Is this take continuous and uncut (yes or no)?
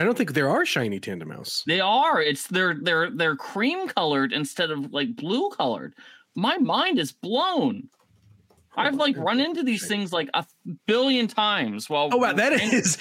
yes